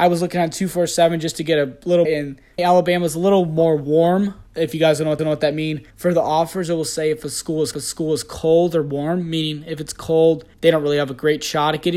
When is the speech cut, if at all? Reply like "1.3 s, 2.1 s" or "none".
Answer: 2.0 s, 2.6 s, 4.5 s, 5.2 s, 5.9 s, 7.7 s, 10.5 s